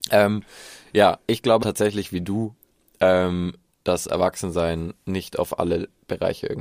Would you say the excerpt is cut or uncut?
cut